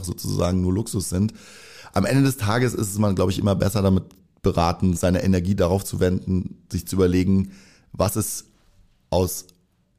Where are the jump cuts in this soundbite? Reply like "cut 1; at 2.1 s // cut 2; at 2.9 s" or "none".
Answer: cut 1; at 5.0 s